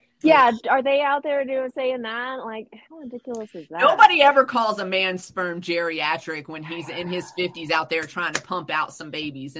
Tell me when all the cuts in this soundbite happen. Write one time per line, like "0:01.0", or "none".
0:02.8